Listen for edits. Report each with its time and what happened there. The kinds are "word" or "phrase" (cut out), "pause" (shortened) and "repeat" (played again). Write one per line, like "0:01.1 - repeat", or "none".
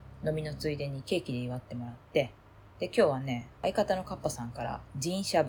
0:02.7 - pause

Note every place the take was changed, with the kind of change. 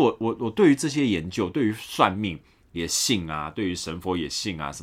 none

